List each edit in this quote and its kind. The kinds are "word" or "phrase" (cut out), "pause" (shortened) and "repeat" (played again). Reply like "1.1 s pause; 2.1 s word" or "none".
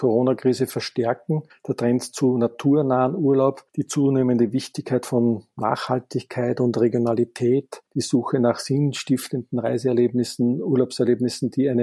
3.7 s pause; 7.9 s pause

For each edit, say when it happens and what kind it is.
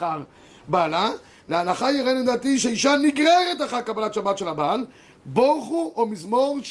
none

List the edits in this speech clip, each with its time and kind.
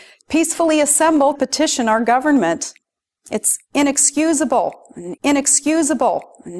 1.4 s word; 5.2 s repeat

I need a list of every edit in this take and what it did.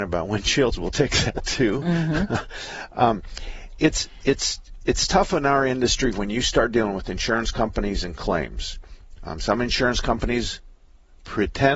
none

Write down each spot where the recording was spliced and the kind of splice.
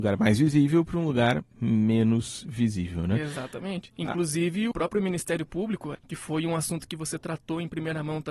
4.7 s word; 5.9 s word

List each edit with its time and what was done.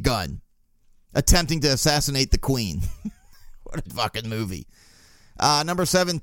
3.9 s word

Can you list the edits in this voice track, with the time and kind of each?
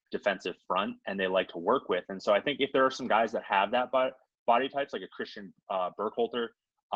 none

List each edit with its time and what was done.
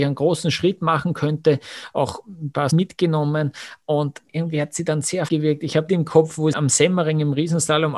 2.7 s word; 5.3 s word; 5.9 s phrase; 6.5 s word

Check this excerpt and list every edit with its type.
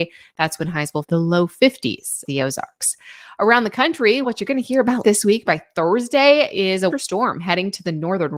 1.0 s phrase; 2.2 s word; 4.2 s word; 5.0 s word; 5.5 s word; 6.9 s word

